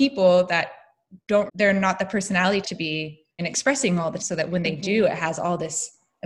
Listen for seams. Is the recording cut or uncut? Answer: cut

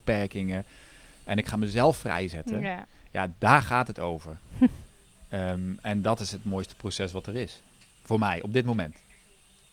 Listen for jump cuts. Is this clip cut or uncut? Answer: uncut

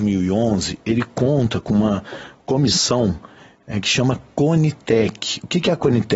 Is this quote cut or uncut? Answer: uncut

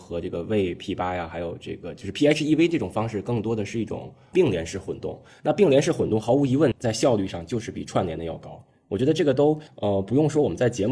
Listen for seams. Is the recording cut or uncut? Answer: uncut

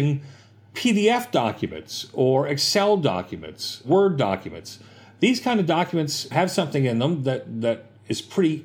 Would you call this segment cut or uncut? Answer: uncut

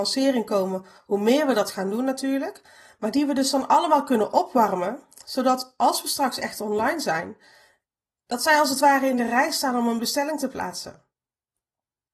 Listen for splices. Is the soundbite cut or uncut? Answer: uncut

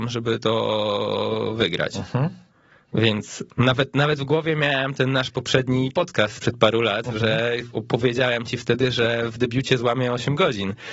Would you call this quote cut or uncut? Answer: uncut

